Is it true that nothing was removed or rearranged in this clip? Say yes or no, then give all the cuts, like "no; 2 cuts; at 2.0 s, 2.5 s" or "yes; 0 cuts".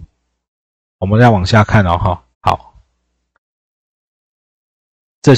no; 1 cut; at 2.3 s